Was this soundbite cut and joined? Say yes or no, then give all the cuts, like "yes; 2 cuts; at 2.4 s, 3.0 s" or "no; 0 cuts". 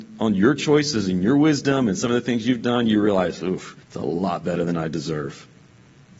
yes; 1 cut; at 3.8 s